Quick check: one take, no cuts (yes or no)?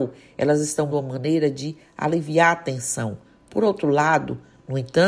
no